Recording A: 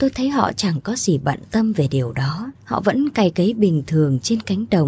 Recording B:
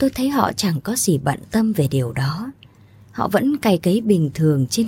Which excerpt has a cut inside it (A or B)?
A